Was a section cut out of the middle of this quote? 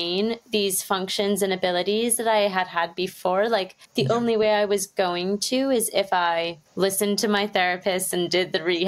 yes; 2 cuts; at 3.8 s, 6.7 s

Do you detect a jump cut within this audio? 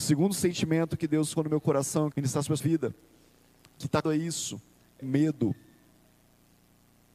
yes; 5 cuts; at 1.4 s, 2.1 s, 2.6 s, 4.0 s, 5.0 s

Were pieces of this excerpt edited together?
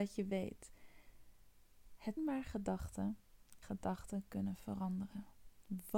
yes; 2 cuts; at 2.2 s, 3.6 s

